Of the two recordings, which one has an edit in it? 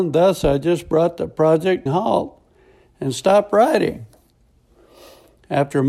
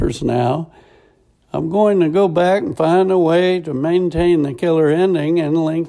first; 1 cut; at 1.9 s

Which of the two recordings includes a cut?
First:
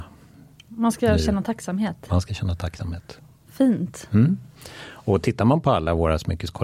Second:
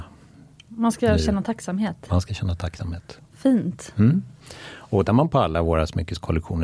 second; 2 cuts; at 3.3 s, 5.1 s

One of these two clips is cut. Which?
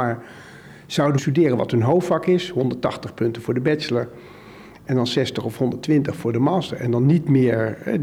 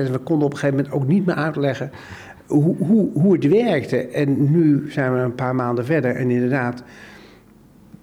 first; 1 cut; at 1.2 s

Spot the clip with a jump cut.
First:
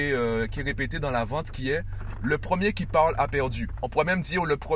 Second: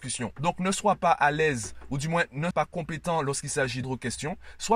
second; 2 cuts; at 2.5 s, 3.8 s

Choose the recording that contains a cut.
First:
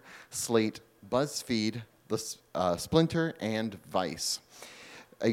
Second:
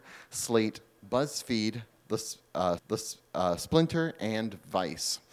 second; 1 cut; at 2.8 s

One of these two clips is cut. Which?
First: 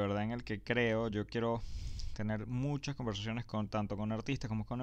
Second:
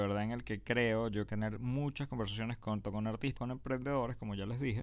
second; 3 cuts; at 1.3 s, 2.8 s, 3.4 s

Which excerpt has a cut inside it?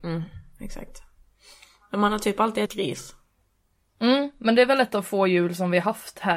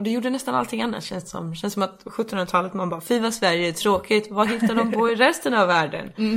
first; 1 cut; at 2.7 s

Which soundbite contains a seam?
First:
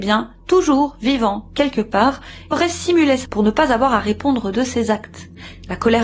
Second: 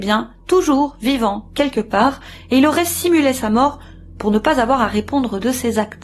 first; 2 cuts; at 2.5 s, 3.3 s

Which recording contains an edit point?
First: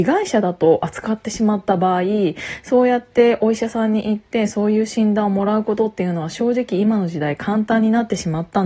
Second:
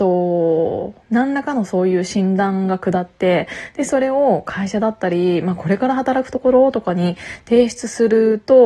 second; 1 cut; at 1.0 s

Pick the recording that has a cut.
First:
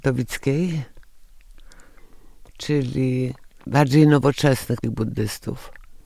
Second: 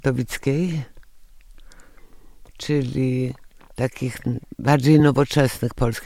first; 2 cuts; at 3.6 s, 4.8 s

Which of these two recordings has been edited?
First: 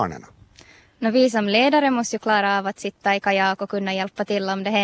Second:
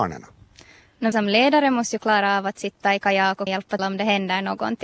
second; 3 cuts; at 1.1 s, 3.5 s, 3.8 s

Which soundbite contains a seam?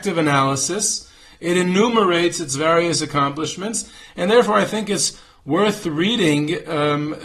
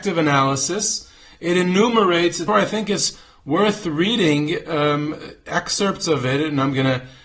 second; 1 cut; at 2.5 s

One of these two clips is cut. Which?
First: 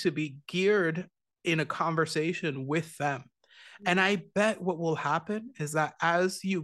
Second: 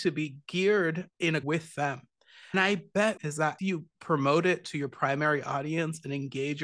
second; 6 cuts; at 1.1 s, 1.4 s, 2.5 s, 3.2 s, 3.6 s, 3.9 s

